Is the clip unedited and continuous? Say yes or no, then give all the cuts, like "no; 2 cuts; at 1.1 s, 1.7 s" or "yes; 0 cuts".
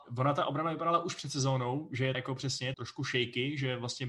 no; 2 cuts; at 2.1 s, 2.7 s